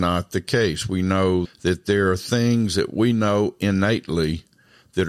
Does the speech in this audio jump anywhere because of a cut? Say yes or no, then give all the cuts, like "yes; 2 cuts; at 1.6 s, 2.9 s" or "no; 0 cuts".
yes; 1 cut; at 1.5 s